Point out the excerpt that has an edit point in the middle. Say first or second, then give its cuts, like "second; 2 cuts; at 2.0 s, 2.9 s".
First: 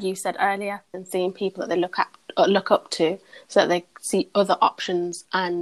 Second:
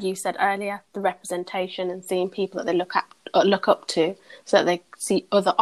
first; 1 cut; at 0.9 s